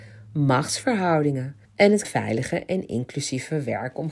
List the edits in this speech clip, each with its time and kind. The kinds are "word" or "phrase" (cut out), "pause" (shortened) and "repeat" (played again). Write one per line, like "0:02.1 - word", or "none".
0:01.6 - pause
0:02.0 - phrase